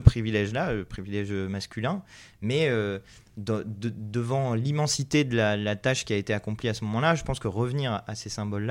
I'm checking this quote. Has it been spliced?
no; 0 cuts

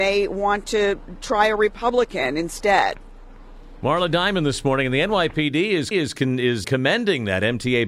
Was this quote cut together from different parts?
yes; 2 cuts; at 5.9 s, 6.6 s

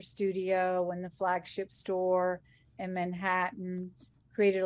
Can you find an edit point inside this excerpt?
no; 0 cuts

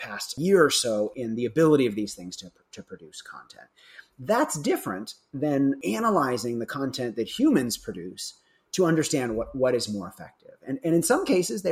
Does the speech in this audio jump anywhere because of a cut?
no; 0 cuts

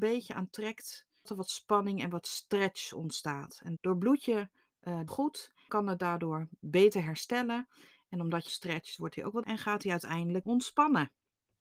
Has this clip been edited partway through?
yes; 7 cuts; at 1.3 s, 3.8 s, 5.1 s, 5.7 s, 8.5 s, 9.4 s, 10.4 s

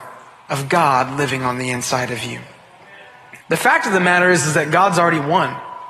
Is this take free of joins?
no; 1 cut; at 3.4 s

